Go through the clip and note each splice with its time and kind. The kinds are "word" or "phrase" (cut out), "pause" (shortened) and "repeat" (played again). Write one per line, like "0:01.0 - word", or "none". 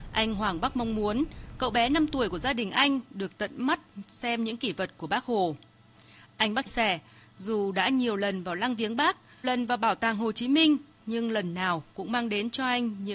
0:06.7 - word
0:09.4 - word